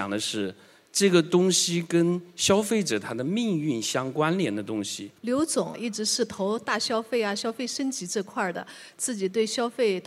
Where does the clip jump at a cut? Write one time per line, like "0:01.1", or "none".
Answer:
0:05.2